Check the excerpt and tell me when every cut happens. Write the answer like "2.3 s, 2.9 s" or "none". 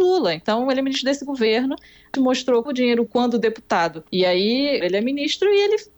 2.1 s, 2.7 s, 3.1 s, 4.1 s, 4.8 s